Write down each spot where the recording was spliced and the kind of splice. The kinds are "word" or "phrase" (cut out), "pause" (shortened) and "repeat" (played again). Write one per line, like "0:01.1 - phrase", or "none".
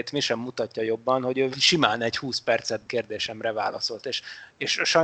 0:01.5 - phrase
0:02.9 - phrase